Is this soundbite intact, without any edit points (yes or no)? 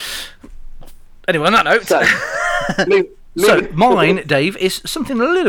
no